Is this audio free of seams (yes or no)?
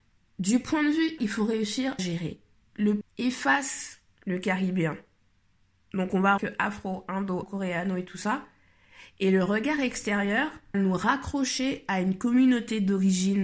no